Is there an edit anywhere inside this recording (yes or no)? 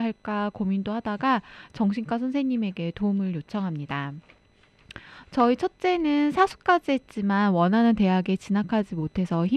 no